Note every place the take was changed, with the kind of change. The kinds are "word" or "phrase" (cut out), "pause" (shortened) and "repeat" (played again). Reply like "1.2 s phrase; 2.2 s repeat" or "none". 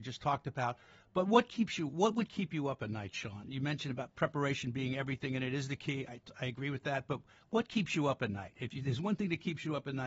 none